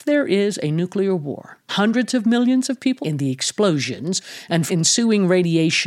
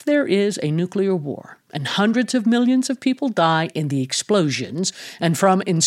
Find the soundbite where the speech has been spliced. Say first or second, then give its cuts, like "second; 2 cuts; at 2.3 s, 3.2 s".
first; 3 cuts; at 1.7 s, 3.0 s, 4.7 s